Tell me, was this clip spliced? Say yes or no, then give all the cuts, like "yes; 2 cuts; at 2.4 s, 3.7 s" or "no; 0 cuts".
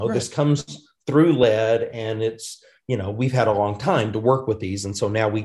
no; 0 cuts